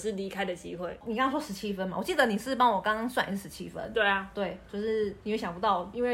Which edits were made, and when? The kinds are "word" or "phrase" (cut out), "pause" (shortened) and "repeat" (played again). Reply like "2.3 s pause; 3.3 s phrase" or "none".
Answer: 4.7 s phrase